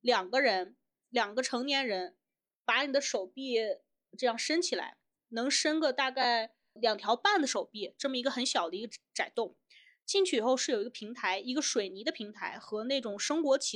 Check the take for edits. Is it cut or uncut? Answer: cut